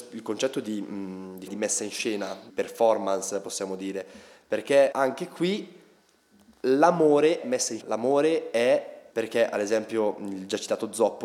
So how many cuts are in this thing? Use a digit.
6